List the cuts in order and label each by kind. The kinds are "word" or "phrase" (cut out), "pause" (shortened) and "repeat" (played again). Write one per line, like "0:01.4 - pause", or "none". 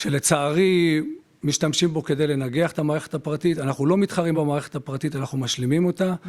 none